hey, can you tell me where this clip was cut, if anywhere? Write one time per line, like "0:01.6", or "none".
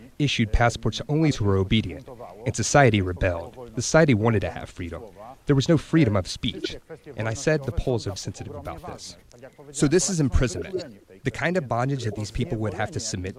0:01.3
0:08.2